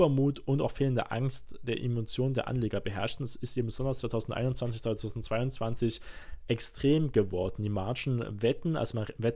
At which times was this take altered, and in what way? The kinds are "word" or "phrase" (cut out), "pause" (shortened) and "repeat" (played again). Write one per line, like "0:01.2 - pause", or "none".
none